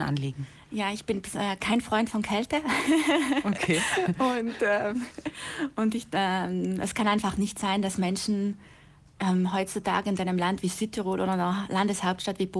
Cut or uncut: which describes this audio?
uncut